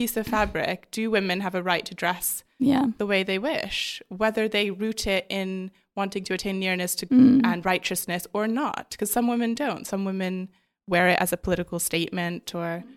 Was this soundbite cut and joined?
yes; 1 cut; at 7.1 s

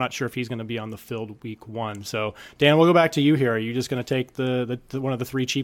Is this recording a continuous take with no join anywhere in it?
yes; 0 cuts

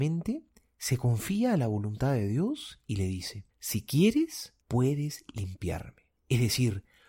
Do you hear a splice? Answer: yes; 3 cuts; at 3.5 s, 4.6 s, 6.2 s

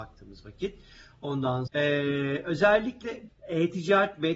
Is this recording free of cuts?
no; 2 cuts; at 1.7 s, 3.3 s

